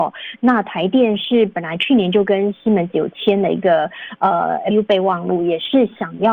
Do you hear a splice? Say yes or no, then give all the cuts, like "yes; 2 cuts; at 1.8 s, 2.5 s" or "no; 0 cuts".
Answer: yes; 1 cut; at 4.7 s